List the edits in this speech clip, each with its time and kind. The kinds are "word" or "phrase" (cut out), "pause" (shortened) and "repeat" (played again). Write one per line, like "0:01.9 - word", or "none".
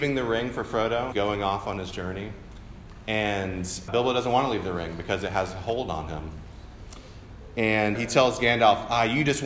0:01.1 - word
0:03.9 - word
0:07.9 - word